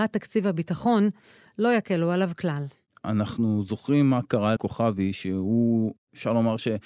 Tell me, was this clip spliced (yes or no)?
yes